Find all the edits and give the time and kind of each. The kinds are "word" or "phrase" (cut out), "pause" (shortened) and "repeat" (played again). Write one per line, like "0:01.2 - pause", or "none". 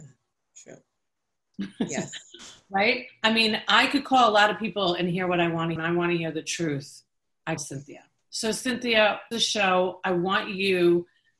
0:05.8 - phrase
0:07.6 - word
0:09.3 - phrase